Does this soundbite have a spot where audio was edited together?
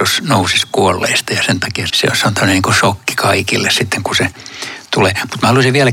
yes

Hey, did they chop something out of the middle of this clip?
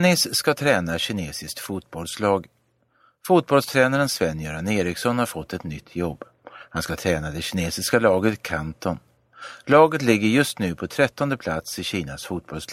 no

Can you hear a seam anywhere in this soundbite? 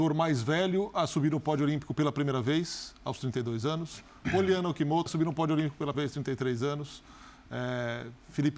yes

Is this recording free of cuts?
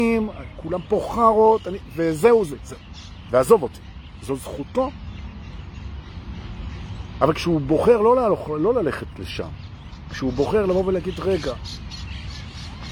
no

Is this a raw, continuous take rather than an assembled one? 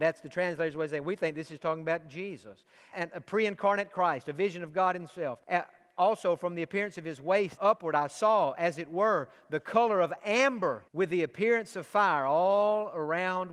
no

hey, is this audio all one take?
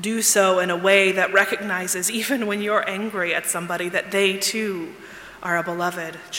yes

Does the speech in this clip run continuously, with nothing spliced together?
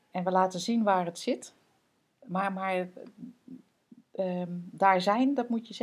yes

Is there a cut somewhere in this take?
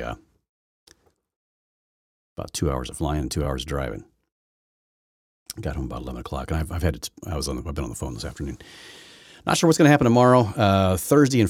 no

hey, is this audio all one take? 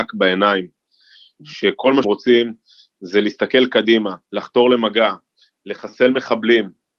no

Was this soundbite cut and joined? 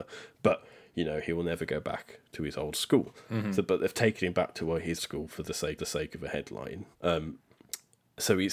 yes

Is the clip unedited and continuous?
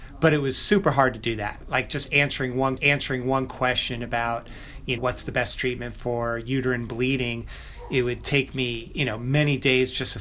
no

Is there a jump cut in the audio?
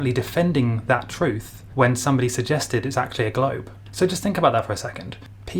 no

